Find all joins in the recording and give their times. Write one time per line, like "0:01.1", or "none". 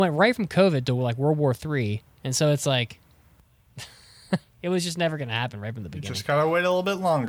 none